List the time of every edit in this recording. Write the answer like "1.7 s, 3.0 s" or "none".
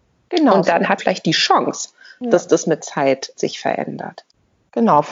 1.0 s, 2.8 s, 3.3 s